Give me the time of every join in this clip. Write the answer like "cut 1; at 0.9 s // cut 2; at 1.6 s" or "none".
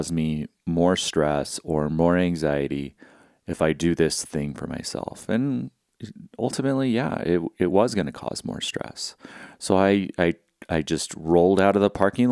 none